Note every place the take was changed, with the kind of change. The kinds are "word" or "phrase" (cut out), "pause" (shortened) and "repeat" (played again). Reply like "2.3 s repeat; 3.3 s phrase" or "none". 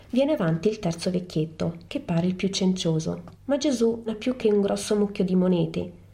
1.9 s pause; 3.3 s pause; 4.1 s word